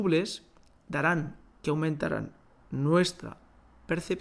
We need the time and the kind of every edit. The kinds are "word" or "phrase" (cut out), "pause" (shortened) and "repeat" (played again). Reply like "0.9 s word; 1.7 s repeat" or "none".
1.6 s phrase